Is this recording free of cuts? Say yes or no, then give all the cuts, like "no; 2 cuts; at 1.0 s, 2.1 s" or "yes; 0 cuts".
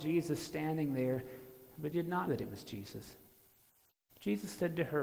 no; 2 cuts; at 1.9 s, 2.3 s